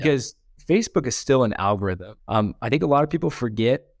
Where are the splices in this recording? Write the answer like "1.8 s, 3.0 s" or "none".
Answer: 2.2 s

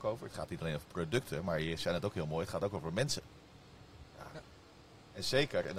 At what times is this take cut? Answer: 4.1 s

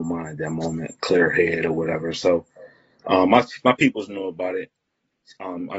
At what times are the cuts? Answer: none

